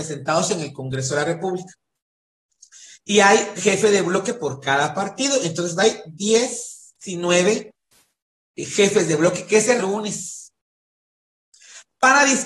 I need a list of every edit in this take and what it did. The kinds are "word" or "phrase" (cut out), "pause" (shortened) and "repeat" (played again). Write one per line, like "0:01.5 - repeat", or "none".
0:03.6 - word
0:09.8 - phrase